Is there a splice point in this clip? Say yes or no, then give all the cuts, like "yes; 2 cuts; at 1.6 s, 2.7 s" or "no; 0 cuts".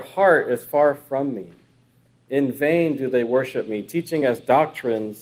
no; 0 cuts